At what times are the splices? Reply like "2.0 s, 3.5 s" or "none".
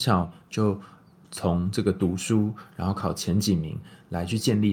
none